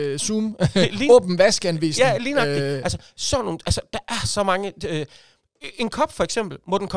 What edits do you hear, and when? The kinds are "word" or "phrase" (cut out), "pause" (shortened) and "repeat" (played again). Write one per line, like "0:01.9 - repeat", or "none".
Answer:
none